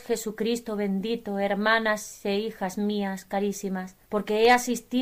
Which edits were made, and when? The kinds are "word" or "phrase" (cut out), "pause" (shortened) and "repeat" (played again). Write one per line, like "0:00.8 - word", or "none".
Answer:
0:04.0 - pause

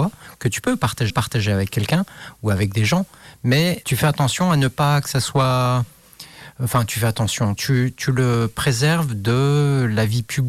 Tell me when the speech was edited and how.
0:01.1 - repeat
0:03.8 - word
0:07.6 - word

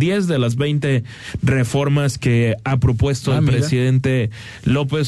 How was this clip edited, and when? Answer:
none

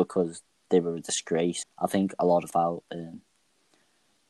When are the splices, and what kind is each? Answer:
0:01.6 - word
0:02.5 - phrase

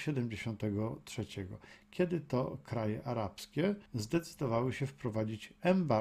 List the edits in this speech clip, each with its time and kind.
0:03.9 - pause

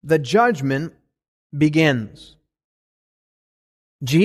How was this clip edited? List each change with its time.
none

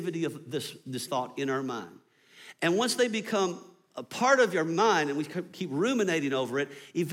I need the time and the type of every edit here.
0:01.1 - word

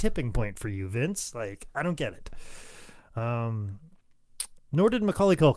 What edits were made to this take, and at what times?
none

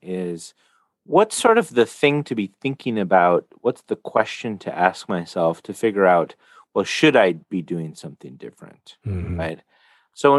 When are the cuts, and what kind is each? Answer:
none

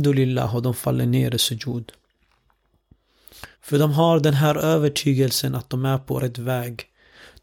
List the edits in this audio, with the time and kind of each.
0:03.5 - pause

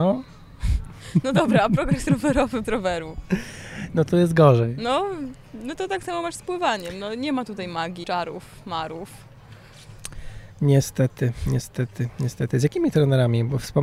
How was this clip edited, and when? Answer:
0:02.6 - word
0:08.0 - word

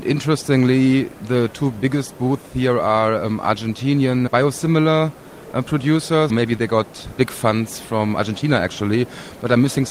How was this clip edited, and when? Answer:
0:04.3 - word
0:06.3 - word
0:07.2 - word

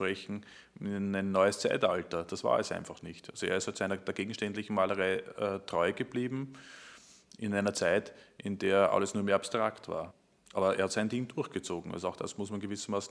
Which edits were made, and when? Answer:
none

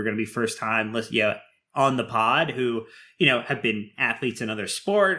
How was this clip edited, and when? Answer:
none

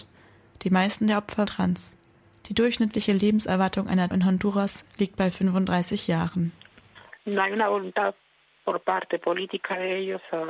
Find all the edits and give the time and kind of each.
0:01.5 - word
0:04.1 - word

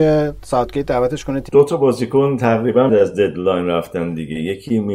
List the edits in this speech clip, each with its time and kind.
0:01.5 - word
0:02.9 - word

